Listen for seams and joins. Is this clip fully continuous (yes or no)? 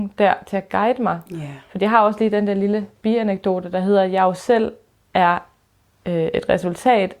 yes